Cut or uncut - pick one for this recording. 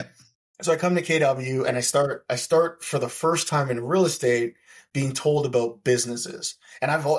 uncut